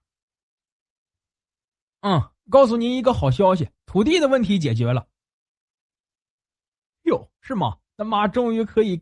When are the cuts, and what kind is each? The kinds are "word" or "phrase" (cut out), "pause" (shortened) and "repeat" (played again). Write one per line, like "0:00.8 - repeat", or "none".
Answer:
0:02.4 - pause
0:03.7 - pause
0:07.3 - pause
0:07.9 - pause